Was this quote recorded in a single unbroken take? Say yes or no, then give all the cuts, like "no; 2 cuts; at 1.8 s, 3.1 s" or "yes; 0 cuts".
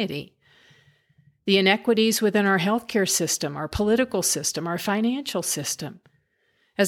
yes; 0 cuts